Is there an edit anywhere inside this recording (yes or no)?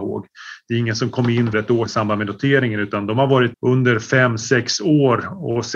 yes